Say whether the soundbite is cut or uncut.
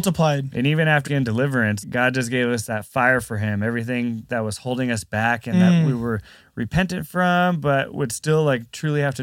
cut